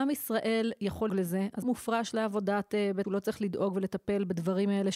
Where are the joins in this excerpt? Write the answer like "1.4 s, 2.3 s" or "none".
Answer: 1.1 s, 1.6 s, 3.0 s